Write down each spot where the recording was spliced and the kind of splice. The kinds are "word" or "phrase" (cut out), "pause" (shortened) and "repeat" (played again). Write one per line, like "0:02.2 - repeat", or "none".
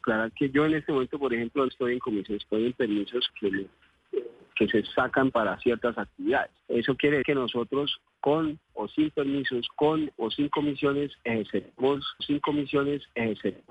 0:01.7 - word
0:02.4 - word
0:03.3 - word
0:05.3 - word
0:06.6 - pause
0:07.2 - word
0:08.6 - pause
0:12.2 - repeat

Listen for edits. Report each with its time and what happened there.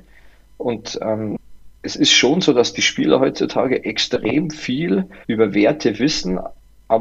0:01.8 - pause
0:05.2 - pause

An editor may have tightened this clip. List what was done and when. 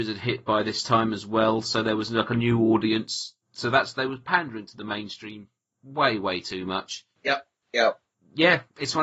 none

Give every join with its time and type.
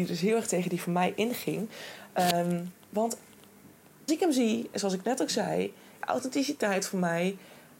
0:04.1 - word
0:06.0 - word

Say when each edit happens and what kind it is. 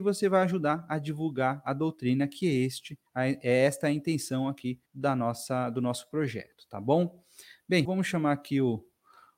0:03.1 - pause
0:04.9 - pause
0:07.8 - word

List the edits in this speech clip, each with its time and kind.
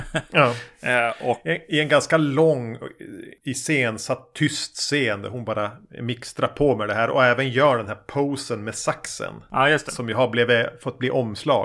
none

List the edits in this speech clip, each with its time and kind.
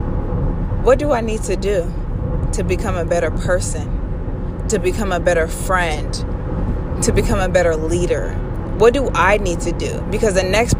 none

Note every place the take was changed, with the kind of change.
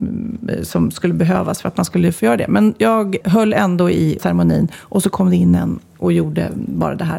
0:03.2 - word
0:04.2 - word

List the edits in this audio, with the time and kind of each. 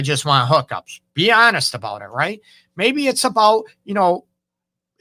none

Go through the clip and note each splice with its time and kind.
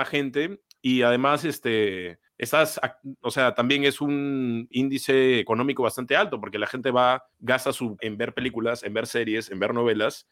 0:02.3 - pause
0:04.7 - phrase
0:07.3 - pause
0:08.0 - word

